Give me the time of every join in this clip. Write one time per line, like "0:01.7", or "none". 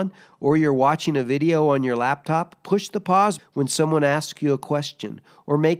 0:03.4